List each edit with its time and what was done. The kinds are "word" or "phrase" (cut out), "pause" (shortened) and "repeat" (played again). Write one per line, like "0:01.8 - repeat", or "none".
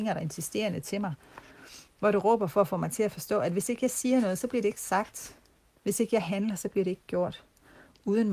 none